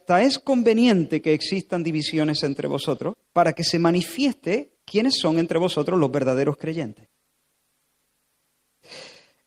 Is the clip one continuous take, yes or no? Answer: no